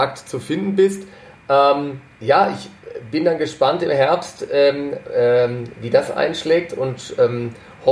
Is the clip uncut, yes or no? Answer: yes